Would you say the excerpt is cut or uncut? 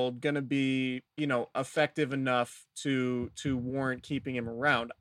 cut